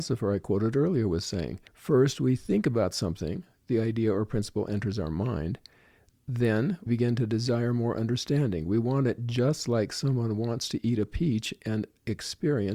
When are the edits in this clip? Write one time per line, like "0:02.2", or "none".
0:01.7
0:06.9

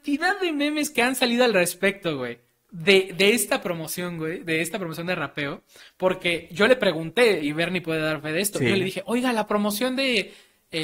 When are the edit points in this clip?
none

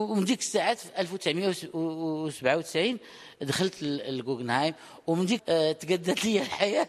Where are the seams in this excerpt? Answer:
0:05.4

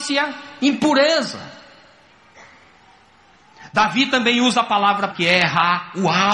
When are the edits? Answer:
0:05.1

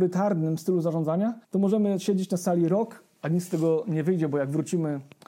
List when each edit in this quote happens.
0:01.4

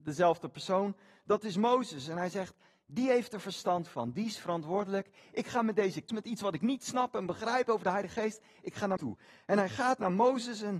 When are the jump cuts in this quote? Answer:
0:06.1
0:09.0

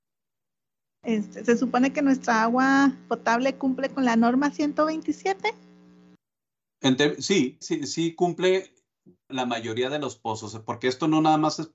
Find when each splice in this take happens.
0:07.6
0:09.3

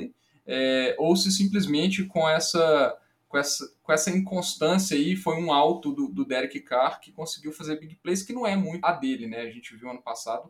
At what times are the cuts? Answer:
0:08.8

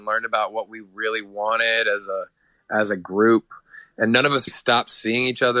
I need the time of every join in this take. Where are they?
0:04.5

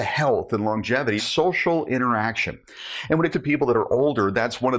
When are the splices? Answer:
0:01.2
0:03.3

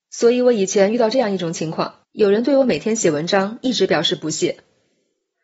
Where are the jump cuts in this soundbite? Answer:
0:02.0

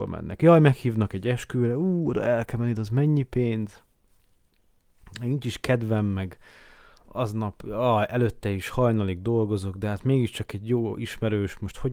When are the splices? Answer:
none

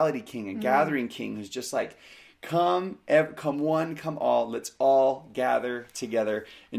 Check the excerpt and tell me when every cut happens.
none

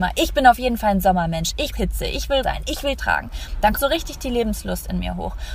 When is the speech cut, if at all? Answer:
0:01.7
0:02.4
0:03.0
0:03.8

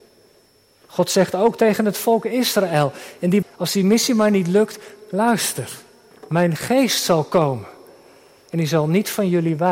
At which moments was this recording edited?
0:03.4
0:06.1

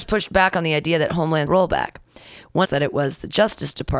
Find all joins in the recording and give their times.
0:01.5
0:02.6

